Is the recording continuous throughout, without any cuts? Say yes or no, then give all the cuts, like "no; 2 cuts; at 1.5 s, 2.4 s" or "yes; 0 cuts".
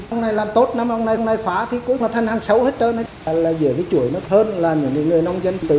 no; 3 cuts; at 1.2 s, 2.0 s, 4.2 s